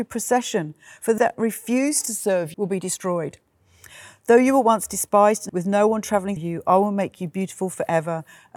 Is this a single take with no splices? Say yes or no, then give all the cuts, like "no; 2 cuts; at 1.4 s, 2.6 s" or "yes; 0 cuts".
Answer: no; 4 cuts; at 1.2 s, 2.5 s, 5.5 s, 6.4 s